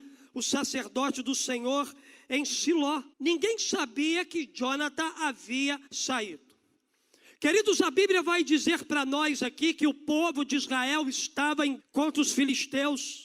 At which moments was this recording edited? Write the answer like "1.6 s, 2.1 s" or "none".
3.1 s, 5.9 s, 11.8 s